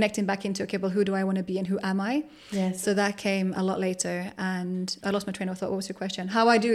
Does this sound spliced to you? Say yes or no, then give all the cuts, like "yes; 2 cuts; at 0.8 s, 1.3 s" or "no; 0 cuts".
yes; 1 cut; at 5.0 s